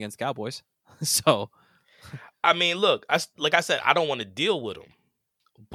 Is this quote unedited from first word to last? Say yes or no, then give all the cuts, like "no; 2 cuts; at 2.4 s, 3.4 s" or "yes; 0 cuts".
yes; 0 cuts